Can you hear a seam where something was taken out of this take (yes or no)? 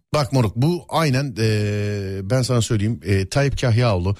no